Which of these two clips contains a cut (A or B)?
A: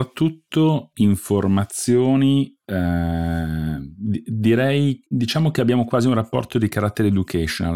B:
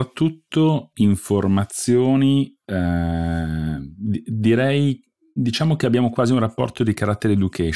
A